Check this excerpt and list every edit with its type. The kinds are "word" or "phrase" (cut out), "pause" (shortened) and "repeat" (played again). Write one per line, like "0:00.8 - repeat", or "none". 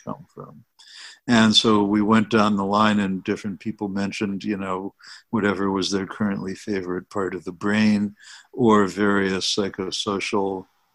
none